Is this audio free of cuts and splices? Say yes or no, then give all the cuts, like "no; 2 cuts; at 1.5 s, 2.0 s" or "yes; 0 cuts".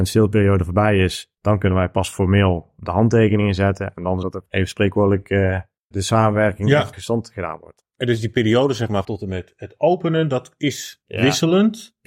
no; 5 cuts; at 1.4 s, 4.2 s, 5.9 s, 6.9 s, 9.0 s